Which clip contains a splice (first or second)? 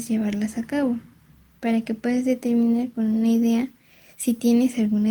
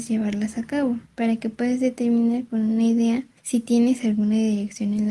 second